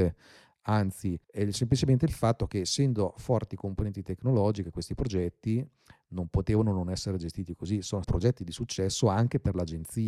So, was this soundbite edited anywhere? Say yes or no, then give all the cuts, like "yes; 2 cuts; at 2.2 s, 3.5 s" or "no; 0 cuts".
yes; 2 cuts; at 1.2 s, 8.0 s